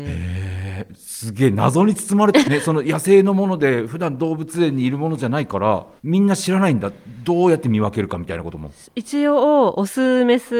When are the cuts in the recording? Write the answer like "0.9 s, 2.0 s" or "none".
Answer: 2.4 s, 6.0 s